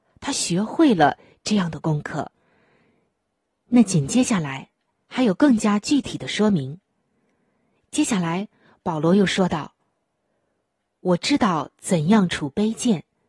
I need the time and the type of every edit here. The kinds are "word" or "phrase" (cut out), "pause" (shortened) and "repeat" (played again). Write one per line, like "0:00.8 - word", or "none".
none